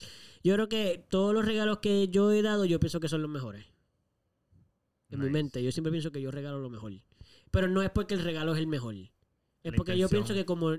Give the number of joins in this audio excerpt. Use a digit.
0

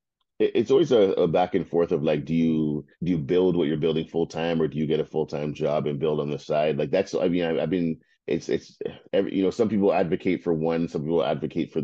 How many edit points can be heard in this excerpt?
3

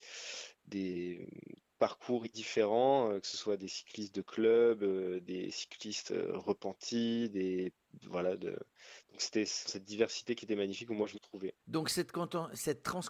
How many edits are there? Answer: 4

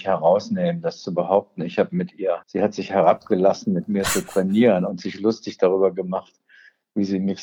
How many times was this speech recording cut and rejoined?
1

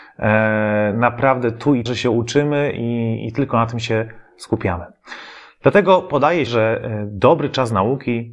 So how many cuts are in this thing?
2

